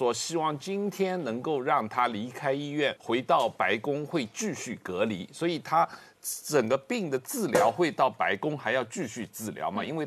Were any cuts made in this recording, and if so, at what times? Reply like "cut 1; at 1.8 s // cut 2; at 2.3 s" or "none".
cut 1; at 3.0 s